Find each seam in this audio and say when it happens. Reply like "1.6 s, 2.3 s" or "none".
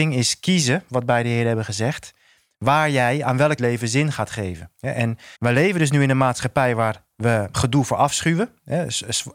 3.6 s, 5.3 s, 7.5 s